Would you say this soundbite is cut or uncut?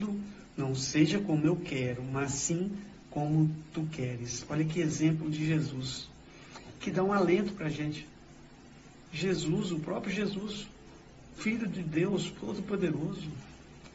uncut